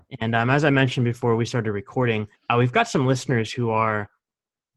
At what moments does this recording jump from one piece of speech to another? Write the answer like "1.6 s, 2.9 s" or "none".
2.3 s